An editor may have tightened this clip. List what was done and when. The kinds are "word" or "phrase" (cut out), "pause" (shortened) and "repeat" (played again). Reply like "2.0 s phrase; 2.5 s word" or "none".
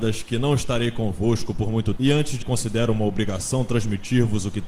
2.0 s word; 2.4 s word